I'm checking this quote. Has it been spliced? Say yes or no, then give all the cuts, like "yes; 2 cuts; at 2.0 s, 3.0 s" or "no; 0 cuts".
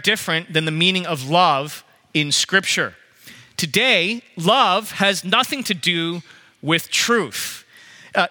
no; 0 cuts